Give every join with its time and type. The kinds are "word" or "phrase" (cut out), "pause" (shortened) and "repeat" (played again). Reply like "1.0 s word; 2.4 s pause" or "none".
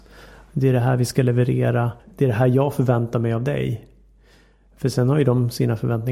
2.0 s pause